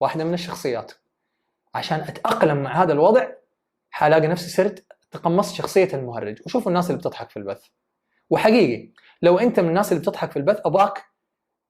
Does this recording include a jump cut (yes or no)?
no